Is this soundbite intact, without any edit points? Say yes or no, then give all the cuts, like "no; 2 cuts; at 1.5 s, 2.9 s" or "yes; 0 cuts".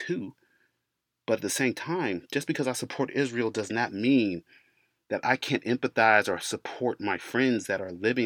yes; 0 cuts